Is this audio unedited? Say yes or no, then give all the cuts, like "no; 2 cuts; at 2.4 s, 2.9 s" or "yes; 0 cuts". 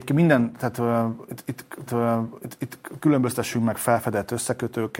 no; 1 cut; at 1.9 s